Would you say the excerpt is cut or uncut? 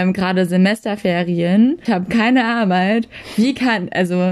cut